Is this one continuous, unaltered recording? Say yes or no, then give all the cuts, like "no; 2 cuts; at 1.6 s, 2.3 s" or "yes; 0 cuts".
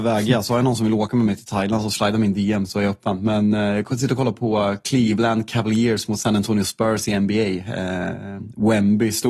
yes; 0 cuts